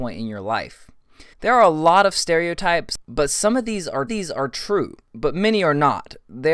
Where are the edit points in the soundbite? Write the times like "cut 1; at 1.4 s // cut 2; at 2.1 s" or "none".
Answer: cut 1; at 1.3 s // cut 2; at 4.1 s